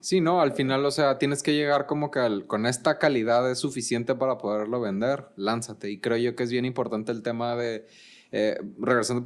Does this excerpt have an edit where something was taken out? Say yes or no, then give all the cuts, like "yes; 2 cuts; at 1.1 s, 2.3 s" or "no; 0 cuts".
no; 0 cuts